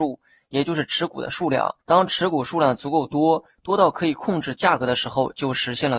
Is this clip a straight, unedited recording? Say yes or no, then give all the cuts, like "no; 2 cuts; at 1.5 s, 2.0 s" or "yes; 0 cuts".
no; 1 cut; at 1.8 s